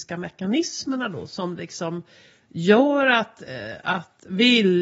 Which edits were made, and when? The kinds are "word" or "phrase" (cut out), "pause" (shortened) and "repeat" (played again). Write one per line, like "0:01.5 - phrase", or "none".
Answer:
none